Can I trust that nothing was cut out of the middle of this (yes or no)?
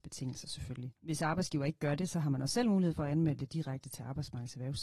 no